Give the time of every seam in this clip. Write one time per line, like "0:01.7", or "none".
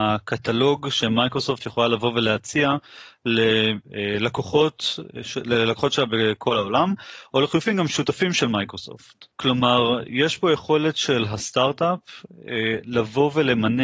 0:09.3